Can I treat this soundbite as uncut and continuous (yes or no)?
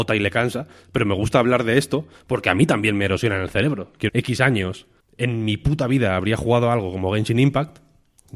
no